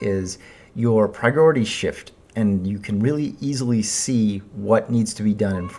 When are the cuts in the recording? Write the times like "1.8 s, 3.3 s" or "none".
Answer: none